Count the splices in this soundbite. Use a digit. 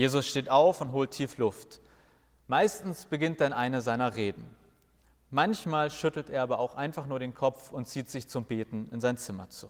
0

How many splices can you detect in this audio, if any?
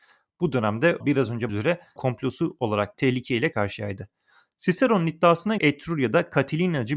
6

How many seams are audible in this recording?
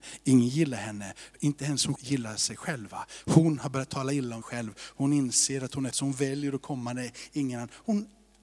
3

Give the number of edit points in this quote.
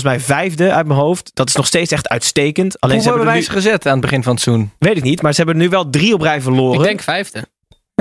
0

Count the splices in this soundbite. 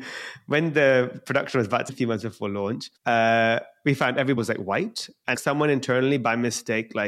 4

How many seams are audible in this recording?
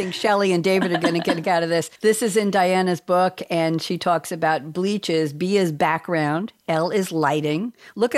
2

